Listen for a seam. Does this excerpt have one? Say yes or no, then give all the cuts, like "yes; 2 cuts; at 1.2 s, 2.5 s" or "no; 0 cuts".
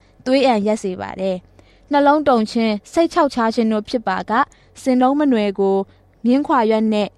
no; 0 cuts